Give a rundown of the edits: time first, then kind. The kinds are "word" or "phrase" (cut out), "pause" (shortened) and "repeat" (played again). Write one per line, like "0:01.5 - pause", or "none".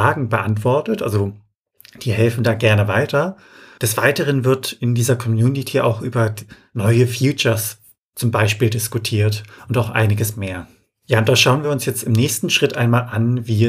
none